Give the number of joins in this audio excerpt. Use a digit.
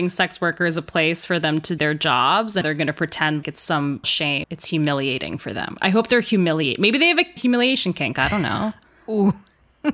6